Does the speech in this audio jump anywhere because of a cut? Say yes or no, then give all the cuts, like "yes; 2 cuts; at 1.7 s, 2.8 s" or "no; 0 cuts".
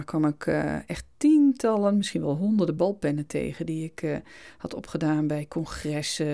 no; 0 cuts